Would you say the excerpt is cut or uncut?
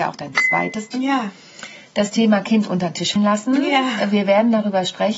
cut